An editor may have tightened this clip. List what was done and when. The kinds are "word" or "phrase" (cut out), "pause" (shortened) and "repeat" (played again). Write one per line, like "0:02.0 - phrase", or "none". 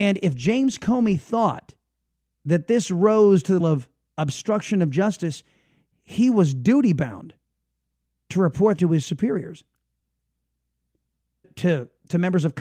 0:03.6 - word
0:08.8 - word
0:11.4 - word